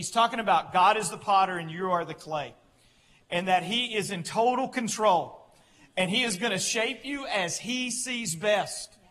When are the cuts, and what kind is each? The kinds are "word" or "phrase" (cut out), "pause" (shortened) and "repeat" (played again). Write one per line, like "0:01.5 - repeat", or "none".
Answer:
none